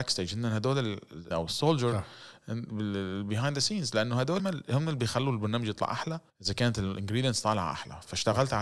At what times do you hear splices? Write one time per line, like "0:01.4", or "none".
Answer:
0:01.3
0:04.4
0:06.3